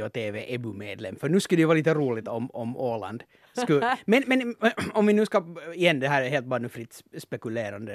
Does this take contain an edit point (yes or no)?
no